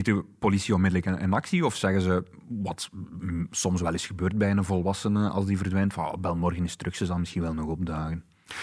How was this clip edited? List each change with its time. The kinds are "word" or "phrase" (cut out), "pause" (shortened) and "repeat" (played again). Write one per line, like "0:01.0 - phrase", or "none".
none